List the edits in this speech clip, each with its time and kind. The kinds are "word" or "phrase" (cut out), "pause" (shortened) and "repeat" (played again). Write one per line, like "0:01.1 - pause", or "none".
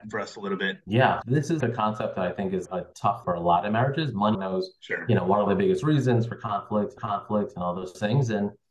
0:01.2 - word
0:01.6 - word
0:02.6 - word
0:03.2 - word
0:04.3 - phrase
0:05.5 - word
0:07.0 - repeat